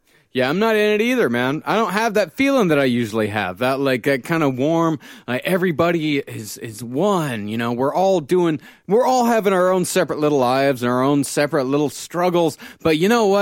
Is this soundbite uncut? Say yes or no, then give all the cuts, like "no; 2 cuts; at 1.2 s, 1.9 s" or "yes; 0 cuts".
yes; 0 cuts